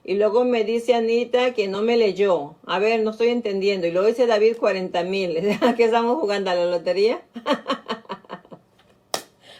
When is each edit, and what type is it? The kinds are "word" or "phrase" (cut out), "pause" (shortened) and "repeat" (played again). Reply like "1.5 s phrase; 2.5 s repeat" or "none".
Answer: none